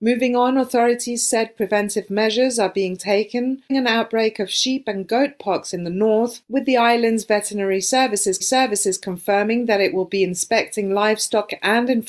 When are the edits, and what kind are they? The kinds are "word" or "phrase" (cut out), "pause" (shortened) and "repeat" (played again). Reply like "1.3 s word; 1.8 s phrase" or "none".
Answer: 3.7 s word; 8.4 s repeat

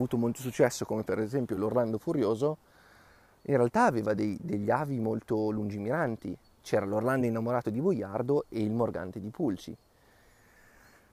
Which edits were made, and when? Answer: none

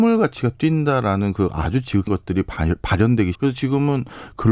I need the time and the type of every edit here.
2.1 s word; 3.3 s word

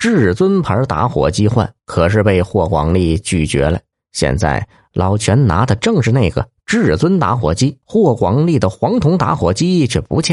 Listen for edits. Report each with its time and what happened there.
1.8 s pause; 3.9 s pause; 7.8 s pause

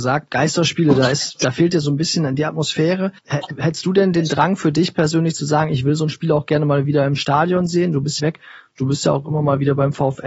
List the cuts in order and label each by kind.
3.2 s pause; 8.2 s phrase

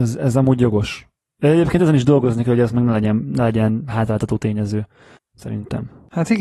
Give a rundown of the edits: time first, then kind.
none

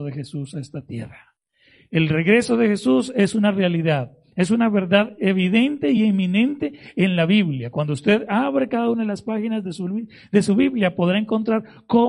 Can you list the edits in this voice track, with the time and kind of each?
none

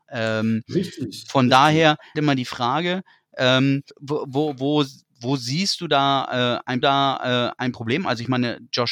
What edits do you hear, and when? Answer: 2.1 s phrase; 3.9 s pause; 6.8 s repeat

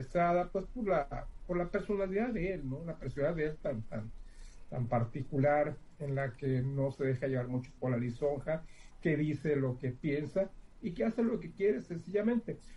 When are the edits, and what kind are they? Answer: none

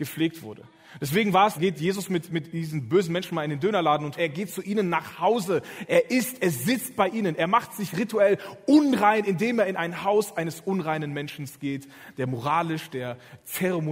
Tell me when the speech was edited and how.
1.6 s phrase; 2.3 s word; 4.2 s phrase

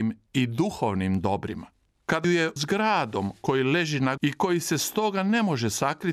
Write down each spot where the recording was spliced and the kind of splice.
2.2 s word; 2.6 s word; 4.2 s word

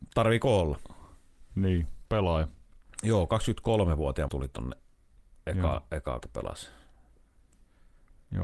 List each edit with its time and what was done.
2.0 s word; 4.3 s word; 6.2 s word

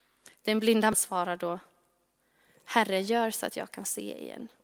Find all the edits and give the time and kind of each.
0.9 s word

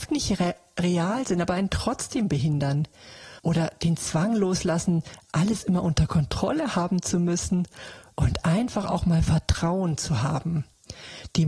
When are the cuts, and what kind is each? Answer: 3.4 s pause

